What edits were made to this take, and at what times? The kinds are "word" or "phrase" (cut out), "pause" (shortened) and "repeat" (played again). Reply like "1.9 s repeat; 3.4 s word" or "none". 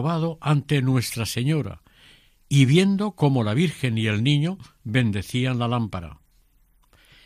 none